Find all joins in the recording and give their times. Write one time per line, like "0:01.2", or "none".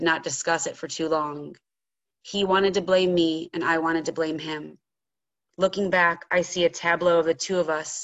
none

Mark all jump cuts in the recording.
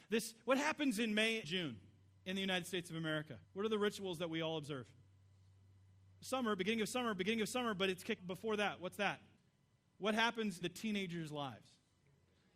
0:01.4
0:03.4
0:07.2
0:08.2
0:09.4
0:10.6

